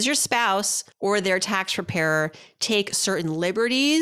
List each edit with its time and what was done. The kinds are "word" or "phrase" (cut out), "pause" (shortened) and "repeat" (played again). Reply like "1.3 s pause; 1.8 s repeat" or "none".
0.9 s pause